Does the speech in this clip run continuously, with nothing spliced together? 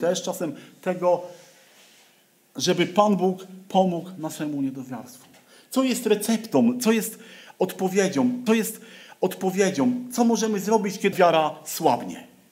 no; 2 cuts; at 8.5 s, 11.1 s

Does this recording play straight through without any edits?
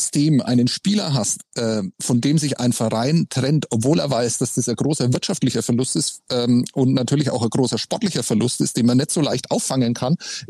no; 1 cut; at 1.9 s

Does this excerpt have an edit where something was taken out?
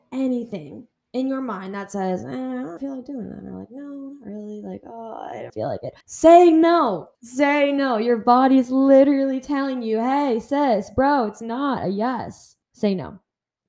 yes; 6 cuts; at 0.9 s, 2.8 s, 5.5 s, 6.0 s, 7.1 s, 12.6 s

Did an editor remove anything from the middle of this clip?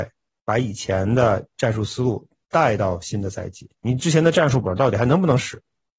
no; 0 cuts

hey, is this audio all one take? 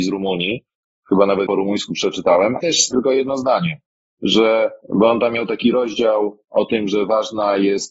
no; 4 cuts; at 1.5 s, 2.6 s, 2.9 s, 4.8 s

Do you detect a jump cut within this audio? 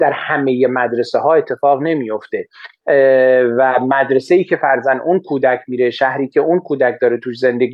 no; 0 cuts

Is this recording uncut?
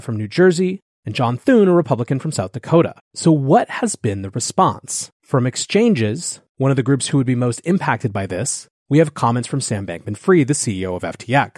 no; 2 cuts; at 3.0 s, 5.2 s

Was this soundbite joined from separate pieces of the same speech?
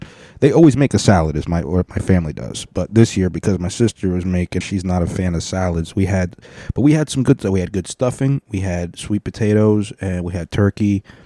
yes; 2 cuts; at 1.6 s, 4.6 s

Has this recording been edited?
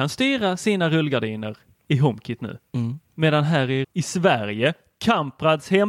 yes; 2 cuts; at 3.0 s, 3.8 s

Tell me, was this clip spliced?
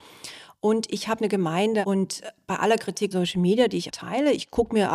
yes; 3 cuts; at 1.2 s, 3.1 s, 3.9 s

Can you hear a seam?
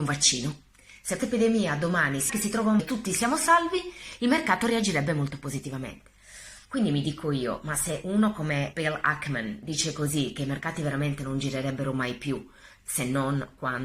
yes; 5 cuts; at 1.2 s, 2.3 s, 2.8 s, 6.6 s, 8.7 s

